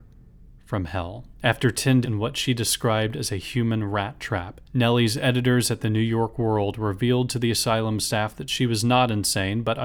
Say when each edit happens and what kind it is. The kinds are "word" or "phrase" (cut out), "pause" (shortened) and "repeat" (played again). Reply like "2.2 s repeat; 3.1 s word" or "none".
1.3 s pause; 2.0 s word; 4.7 s pause